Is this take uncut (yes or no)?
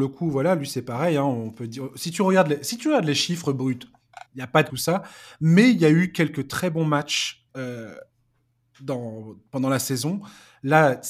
no